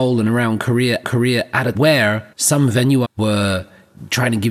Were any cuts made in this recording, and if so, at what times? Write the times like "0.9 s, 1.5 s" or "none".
1.0 s, 1.7 s, 2.3 s, 3.0 s